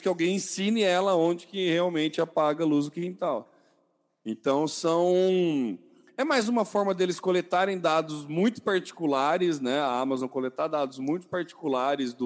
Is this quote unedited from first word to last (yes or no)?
yes